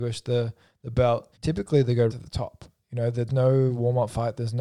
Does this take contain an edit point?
yes; 3 cuts; at 1.3 s, 2.1 s, 3.3 s

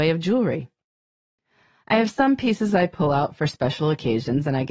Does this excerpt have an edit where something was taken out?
no; 0 cuts

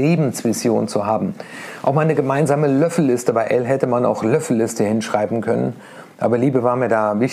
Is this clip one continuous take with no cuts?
yes; 0 cuts

